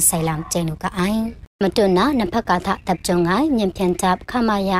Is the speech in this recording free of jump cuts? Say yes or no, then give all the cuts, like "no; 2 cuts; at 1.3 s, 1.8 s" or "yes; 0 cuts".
no; 1 cut; at 1.5 s